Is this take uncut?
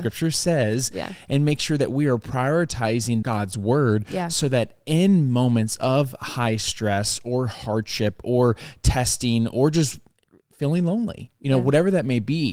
no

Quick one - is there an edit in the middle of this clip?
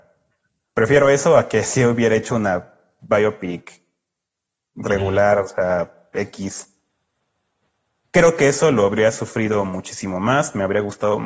no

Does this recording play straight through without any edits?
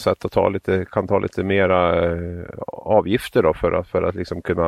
yes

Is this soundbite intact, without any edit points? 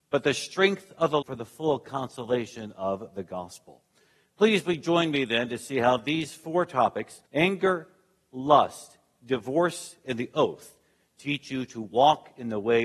no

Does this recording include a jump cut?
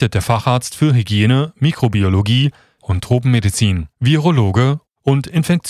yes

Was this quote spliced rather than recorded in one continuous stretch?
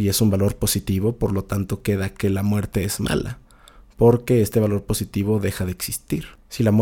no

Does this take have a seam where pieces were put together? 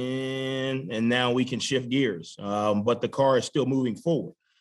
no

